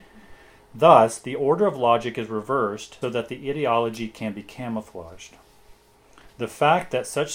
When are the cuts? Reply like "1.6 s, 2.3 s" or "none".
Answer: 3.0 s